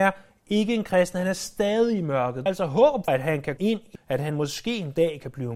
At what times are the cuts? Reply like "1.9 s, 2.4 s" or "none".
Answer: 2.5 s, 3.1 s, 3.6 s, 4.0 s

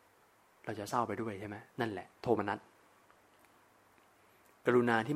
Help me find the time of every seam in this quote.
1.7 s, 2.1 s

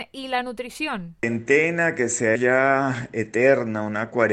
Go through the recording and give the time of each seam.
2.4 s

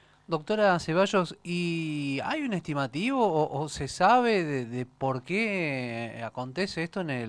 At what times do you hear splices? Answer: none

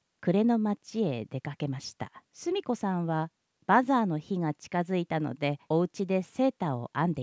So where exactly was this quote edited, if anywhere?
2.3 s, 5.6 s

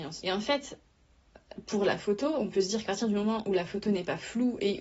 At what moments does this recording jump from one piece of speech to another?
2.9 s

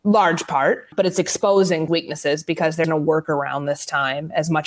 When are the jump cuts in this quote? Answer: 0.9 s, 1.9 s, 2.8 s

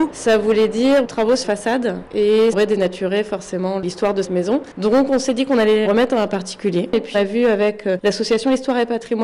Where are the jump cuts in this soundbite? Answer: 1.0 s, 1.4 s, 2.5 s, 4.2 s, 5.9 s, 7.1 s

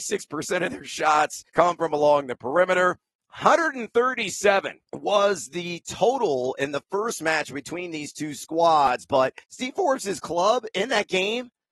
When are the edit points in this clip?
1.5 s, 4.9 s, 9.4 s

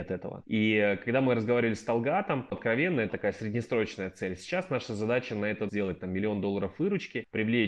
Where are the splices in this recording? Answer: 2.5 s, 3.1 s, 5.7 s

